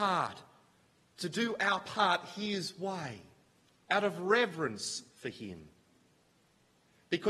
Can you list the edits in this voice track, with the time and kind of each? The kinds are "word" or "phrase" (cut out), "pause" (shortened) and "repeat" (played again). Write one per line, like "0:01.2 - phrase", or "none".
0:03.7 - pause